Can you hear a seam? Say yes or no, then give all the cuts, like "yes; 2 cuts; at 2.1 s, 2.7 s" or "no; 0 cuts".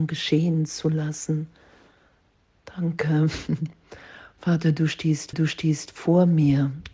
yes; 1 cut; at 5.3 s